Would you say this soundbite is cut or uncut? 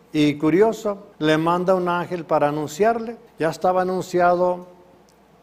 cut